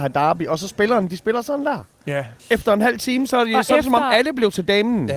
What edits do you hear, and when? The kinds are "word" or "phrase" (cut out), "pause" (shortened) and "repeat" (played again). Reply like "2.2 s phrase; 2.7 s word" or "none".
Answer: 2.4 s pause